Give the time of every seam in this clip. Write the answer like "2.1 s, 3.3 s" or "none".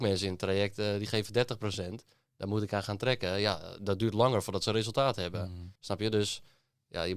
5.8 s